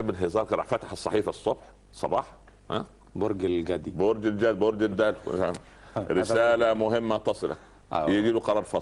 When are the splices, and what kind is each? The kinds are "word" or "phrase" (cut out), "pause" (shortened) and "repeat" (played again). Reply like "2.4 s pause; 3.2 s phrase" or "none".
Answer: none